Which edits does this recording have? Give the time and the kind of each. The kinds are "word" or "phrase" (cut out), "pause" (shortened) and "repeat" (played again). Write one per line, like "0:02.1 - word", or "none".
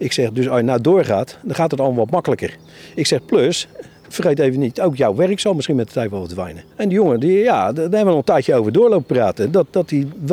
0:06.7 - pause